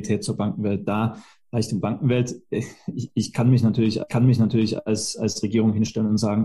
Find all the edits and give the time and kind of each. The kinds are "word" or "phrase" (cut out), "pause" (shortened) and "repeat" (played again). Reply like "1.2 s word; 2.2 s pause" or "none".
1.8 s phrase; 4.1 s repeat